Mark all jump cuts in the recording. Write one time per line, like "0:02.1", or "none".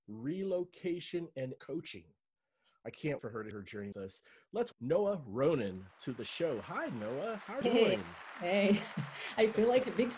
0:01.6
0:03.2
0:03.5
0:03.9
0:04.7
0:07.6